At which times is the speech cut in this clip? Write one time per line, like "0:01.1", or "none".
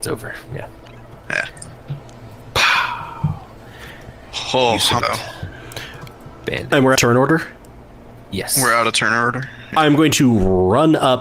0:05.0
0:06.9
0:08.2